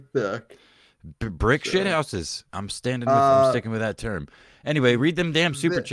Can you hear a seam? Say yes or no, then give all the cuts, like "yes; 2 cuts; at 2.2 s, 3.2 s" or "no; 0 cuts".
yes; 1 cut; at 2.5 s